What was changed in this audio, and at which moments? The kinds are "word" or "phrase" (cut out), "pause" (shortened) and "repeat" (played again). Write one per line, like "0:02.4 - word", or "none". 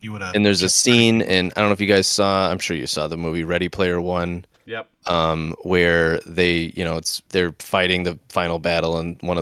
0:07.3 - pause